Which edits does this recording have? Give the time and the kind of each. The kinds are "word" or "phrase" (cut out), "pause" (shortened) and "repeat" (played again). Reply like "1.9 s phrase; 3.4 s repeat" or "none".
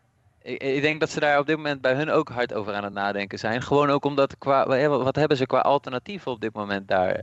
none